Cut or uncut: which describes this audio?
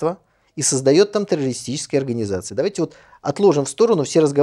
uncut